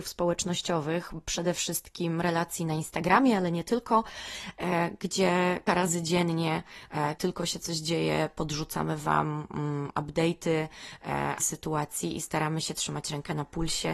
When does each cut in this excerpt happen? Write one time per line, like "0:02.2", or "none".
0:05.7
0:07.2
0:11.4